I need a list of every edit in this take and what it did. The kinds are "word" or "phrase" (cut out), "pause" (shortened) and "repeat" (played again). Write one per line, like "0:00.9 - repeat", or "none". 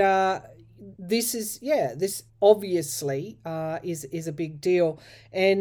0:00.9 - pause
0:02.3 - pause